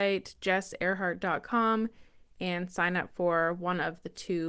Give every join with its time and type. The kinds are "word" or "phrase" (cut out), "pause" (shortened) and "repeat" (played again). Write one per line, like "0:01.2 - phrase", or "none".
none